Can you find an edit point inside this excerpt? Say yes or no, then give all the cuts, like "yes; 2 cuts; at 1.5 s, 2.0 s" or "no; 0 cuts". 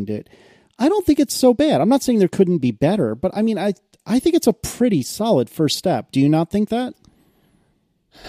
no; 0 cuts